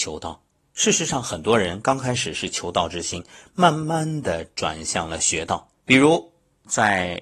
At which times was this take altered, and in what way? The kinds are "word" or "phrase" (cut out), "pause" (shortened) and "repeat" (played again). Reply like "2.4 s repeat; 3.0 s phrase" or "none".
5.8 s pause